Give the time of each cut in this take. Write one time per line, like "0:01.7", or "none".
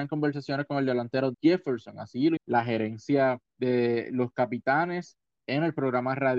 0:01.3
0:02.4
0:03.5